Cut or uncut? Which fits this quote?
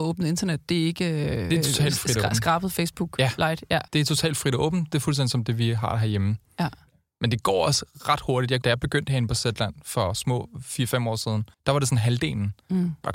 cut